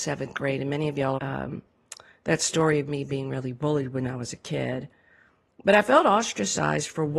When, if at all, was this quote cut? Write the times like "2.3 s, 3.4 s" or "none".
1.2 s